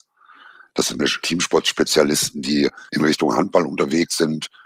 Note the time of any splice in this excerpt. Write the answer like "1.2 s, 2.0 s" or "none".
1.0 s, 2.9 s